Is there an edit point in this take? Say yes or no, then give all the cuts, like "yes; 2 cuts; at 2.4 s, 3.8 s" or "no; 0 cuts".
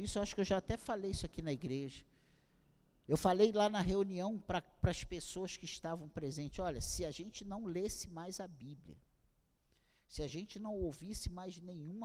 no; 0 cuts